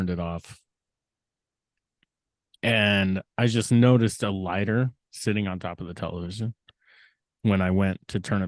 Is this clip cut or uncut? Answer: uncut